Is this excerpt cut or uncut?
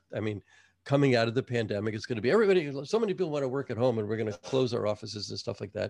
uncut